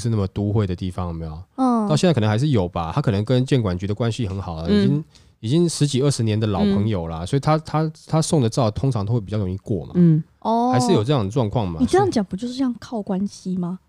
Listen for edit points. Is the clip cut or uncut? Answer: uncut